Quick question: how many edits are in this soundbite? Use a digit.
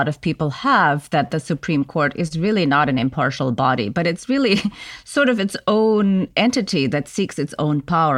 0